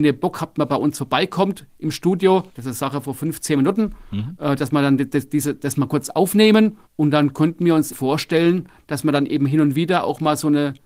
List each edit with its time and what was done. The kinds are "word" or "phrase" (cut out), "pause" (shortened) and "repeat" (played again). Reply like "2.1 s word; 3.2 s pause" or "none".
2.5 s pause; 6.9 s pause; 7.9 s word